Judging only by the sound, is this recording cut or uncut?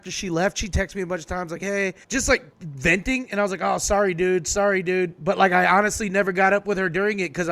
cut